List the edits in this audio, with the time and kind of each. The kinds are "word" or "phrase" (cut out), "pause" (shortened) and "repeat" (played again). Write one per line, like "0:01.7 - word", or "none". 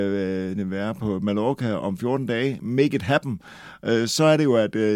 none